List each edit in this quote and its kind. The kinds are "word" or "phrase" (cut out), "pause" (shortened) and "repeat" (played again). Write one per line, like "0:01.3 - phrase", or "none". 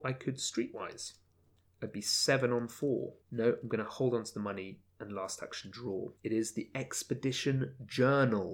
0:03.2 - pause
0:04.9 - pause
0:06.2 - pause